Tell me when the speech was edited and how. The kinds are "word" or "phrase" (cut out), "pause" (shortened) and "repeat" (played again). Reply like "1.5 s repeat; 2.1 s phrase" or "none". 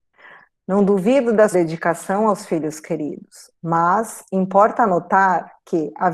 1.5 s word